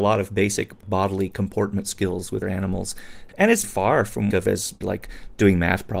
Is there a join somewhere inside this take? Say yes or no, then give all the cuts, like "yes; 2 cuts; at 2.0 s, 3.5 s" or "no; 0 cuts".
yes; 5 cuts; at 2.4 s, 3.3 s, 3.6 s, 4.3 s, 4.8 s